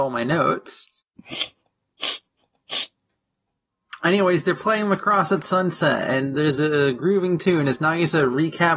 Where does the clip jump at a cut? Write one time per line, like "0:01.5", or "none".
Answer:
none